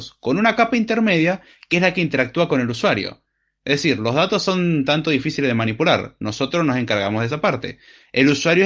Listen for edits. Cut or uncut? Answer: uncut